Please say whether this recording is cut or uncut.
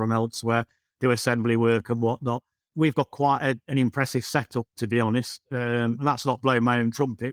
uncut